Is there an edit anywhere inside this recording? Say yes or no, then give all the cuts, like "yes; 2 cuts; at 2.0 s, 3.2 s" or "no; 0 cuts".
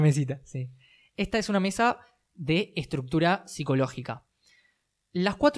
no; 0 cuts